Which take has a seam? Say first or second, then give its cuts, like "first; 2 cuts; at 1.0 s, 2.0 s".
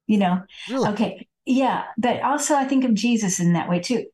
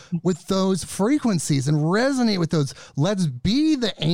first; 1 cut; at 1.4 s